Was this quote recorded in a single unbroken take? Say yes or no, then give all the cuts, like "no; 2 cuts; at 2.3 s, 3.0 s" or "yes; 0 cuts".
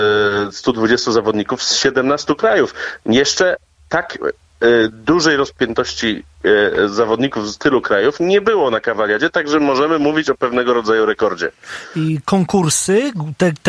yes; 0 cuts